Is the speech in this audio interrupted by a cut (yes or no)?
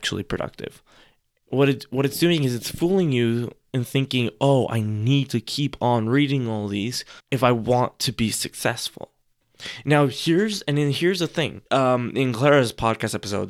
yes